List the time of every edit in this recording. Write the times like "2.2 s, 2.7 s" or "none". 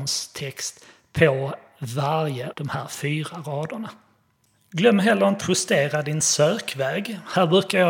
2.5 s, 5.4 s